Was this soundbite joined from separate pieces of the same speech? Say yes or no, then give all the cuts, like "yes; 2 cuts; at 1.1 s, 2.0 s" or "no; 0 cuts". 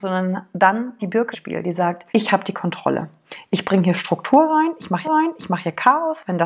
yes; 4 cuts; at 1.0 s, 1.3 s, 2.1 s, 5.0 s